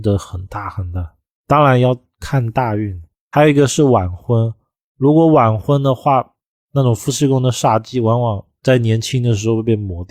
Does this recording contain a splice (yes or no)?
no